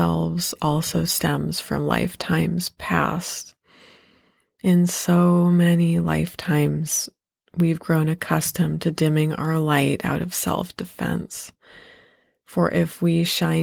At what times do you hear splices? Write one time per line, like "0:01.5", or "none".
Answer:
none